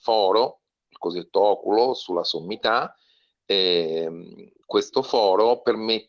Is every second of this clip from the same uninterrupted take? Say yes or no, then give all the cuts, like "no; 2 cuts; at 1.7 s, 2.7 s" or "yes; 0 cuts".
yes; 0 cuts